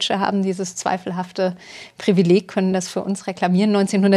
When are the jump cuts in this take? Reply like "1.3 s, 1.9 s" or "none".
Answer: none